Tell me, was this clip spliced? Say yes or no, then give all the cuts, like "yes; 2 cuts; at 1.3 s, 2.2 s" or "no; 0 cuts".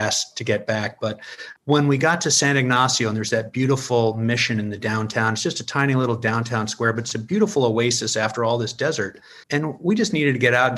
yes; 1 cut; at 9.4 s